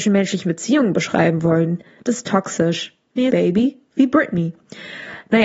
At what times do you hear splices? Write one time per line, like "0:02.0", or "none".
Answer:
0:03.3

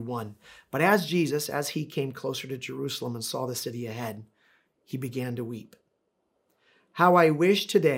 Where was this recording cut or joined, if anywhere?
none

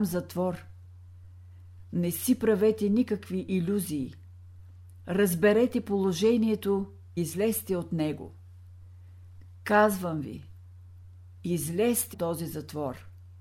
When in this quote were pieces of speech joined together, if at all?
0:07.2
0:12.1

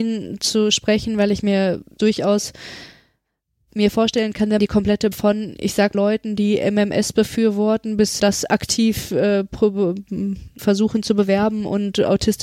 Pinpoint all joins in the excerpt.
0:02.0
0:04.6
0:05.1
0:05.9
0:08.2
0:10.6

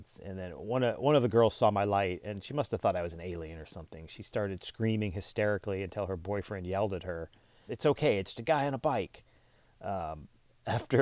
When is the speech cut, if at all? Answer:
0:07.7
0:08.3

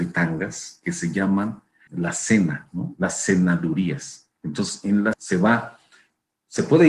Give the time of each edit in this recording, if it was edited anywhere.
0:01.9
0:04.4
0:05.1

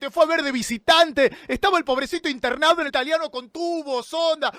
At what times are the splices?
0:02.9

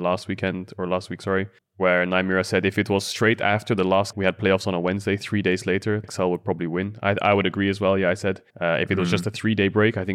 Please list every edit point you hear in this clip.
0:01.6
0:04.1
0:06.0
0:08.5

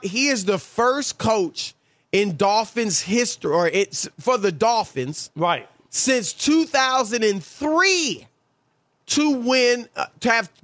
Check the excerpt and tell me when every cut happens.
none

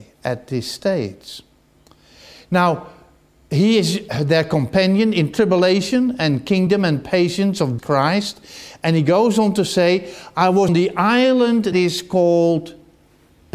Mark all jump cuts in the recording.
0:07.8
0:10.7
0:11.7

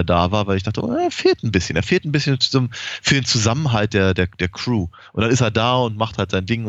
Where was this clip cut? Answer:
none

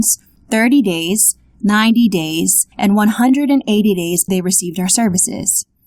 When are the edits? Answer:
0:02.7
0:04.3

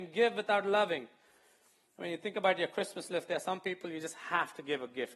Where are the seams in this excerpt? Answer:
none

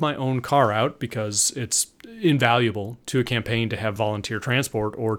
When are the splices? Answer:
none

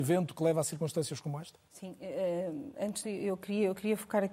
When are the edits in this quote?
0:01.7
0:03.0

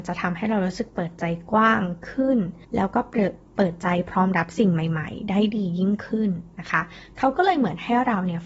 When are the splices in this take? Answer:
0:02.6

